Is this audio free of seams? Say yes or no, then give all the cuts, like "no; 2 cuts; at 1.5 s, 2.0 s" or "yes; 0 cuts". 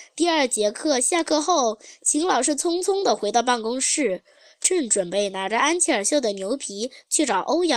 yes; 0 cuts